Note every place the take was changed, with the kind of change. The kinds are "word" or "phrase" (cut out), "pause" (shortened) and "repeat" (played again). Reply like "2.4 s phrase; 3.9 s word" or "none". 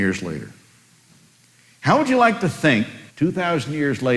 3.1 s pause